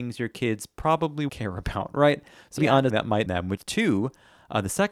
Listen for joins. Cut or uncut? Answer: cut